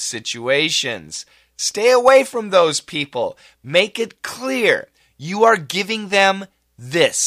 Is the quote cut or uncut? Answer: uncut